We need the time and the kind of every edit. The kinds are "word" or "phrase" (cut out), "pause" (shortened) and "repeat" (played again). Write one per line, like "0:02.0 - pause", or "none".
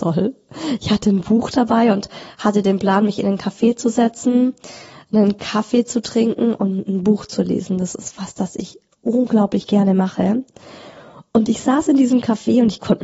none